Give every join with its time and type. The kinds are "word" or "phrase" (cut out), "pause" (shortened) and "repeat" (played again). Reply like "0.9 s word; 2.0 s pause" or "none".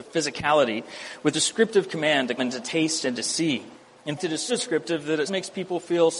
1.3 s word; 2.4 s word; 4.2 s word; 4.5 s word; 5.3 s word